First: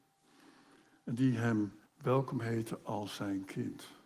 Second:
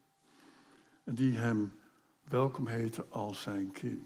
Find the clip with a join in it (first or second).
first